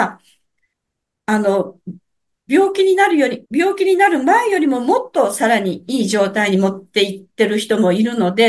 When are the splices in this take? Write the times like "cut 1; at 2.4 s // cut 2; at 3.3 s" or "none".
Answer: cut 1; at 3.4 s